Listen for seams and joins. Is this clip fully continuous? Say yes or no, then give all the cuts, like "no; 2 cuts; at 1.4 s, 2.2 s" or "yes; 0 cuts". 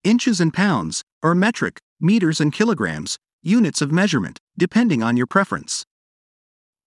yes; 0 cuts